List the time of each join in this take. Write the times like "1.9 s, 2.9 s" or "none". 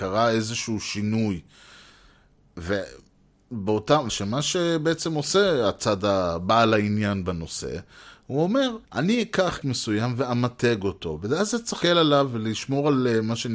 4.1 s, 8.8 s, 9.6 s, 11.8 s